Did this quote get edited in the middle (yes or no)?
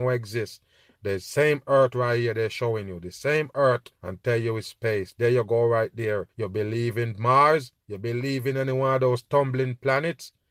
yes